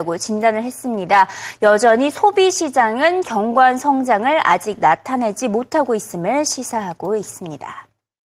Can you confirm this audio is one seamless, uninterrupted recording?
yes; 0 cuts

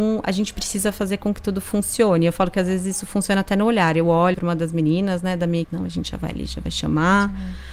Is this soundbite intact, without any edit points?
no; 2 cuts; at 4.3 s, 5.6 s

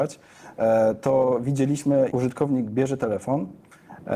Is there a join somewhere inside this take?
yes; 1 cut; at 2.1 s

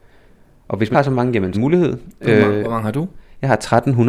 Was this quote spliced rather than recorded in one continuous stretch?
yes; 2 cuts; at 0.9 s, 1.5 s

